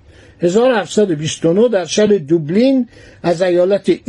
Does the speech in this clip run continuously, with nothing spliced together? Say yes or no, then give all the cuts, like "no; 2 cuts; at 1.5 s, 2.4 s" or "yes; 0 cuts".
yes; 0 cuts